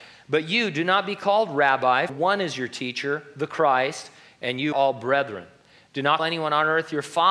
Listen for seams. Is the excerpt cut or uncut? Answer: cut